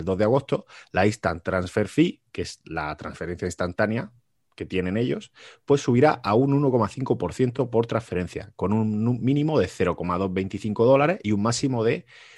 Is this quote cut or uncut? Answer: uncut